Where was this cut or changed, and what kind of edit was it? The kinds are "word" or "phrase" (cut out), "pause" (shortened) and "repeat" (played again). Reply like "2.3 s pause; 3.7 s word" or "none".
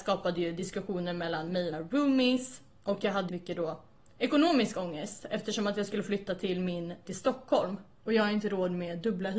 1.7 s word; 3.3 s phrase; 7.1 s word